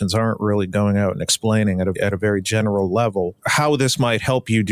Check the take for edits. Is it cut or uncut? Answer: cut